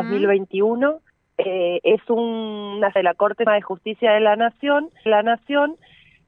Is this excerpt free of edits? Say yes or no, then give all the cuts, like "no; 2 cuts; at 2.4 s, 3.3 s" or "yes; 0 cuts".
no; 4 cuts; at 1.1 s, 3.0 s, 3.5 s, 5.1 s